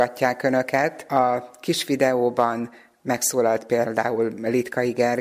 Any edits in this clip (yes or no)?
no